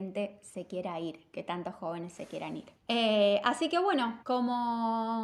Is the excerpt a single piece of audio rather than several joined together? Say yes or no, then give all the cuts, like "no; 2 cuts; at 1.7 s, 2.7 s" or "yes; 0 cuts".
no; 2 cuts; at 2.7 s, 4.2 s